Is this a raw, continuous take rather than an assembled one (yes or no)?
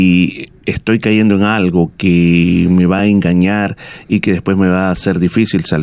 yes